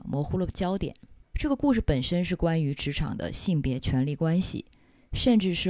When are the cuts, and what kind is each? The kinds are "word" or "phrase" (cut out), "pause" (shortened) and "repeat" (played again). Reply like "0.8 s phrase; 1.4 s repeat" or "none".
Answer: 1.2 s pause